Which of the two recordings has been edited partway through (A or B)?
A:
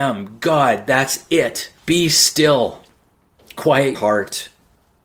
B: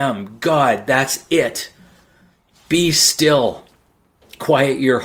A